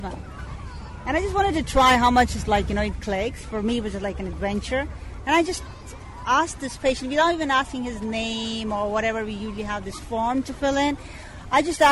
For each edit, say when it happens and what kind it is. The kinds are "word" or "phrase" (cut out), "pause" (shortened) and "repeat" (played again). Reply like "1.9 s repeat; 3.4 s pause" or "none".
none